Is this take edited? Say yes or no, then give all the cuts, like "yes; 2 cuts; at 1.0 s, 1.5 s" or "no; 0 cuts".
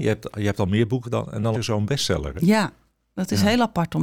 yes; 2 cuts; at 1.0 s, 1.5 s